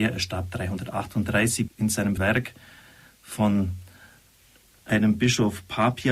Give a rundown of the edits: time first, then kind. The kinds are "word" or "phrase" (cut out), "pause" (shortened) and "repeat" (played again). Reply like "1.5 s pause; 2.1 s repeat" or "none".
1.7 s word; 2.2 s word

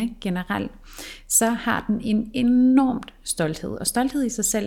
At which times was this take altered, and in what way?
none

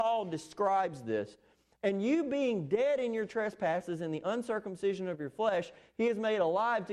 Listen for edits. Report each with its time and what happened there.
none

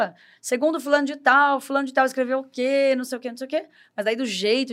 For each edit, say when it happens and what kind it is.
none

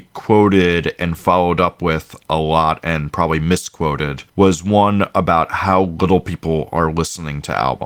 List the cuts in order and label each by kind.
4.3 s pause

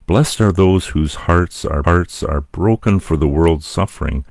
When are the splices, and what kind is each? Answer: 1.8 s repeat

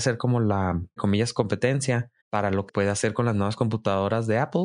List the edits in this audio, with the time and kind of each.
1.0 s word; 2.2 s pause; 2.7 s phrase

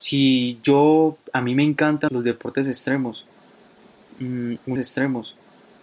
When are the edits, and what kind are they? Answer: 1.2 s pause; 2.1 s word; 4.8 s repeat

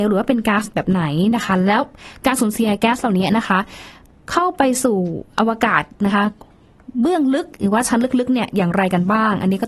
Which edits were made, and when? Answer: none

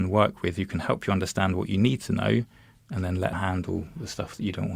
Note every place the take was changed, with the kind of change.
3.3 s word

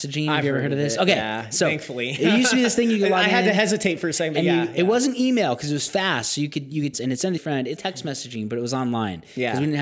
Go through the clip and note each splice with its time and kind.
6.9 s phrase; 7.4 s phrase; 7.8 s word

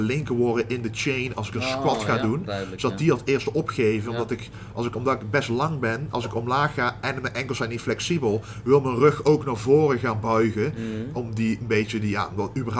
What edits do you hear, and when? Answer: none

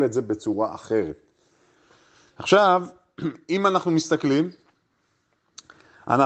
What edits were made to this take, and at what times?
none

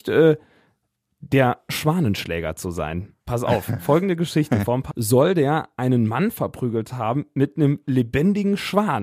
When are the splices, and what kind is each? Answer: 3.2 s pause; 4.9 s word

